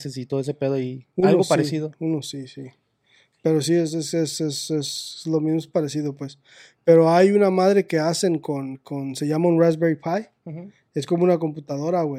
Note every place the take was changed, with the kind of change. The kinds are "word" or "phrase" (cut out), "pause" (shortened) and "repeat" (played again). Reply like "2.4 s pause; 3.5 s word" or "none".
none